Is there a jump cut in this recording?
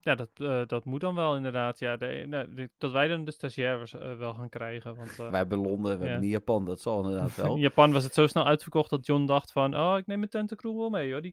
yes; 2 cuts; at 2.8 s, 5.3 s

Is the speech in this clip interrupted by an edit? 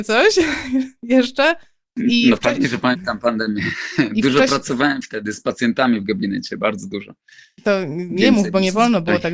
no; 0 cuts

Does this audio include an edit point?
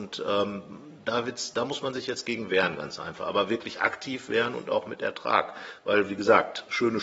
no; 0 cuts

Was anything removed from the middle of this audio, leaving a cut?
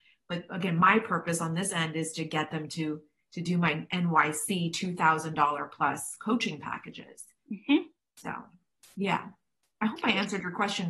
no; 0 cuts

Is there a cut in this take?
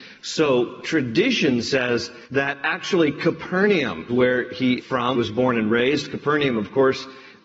yes; 4 cuts; at 2.2 s, 4.1 s, 4.8 s, 5.1 s

